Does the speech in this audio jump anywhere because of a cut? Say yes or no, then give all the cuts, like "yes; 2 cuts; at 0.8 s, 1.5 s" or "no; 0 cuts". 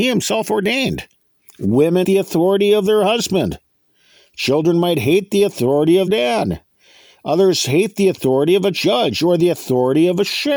yes; 2 cuts; at 2.0 s, 6.1 s